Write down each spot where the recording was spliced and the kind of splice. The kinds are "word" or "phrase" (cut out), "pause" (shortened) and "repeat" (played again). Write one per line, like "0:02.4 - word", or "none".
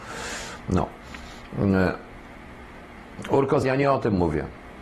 0:03.6 - word